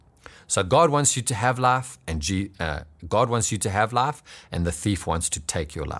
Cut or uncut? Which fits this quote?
uncut